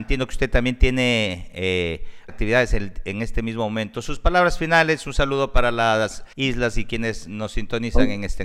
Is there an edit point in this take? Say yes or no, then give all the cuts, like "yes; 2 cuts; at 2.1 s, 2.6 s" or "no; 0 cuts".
yes; 2 cuts; at 2.3 s, 6.3 s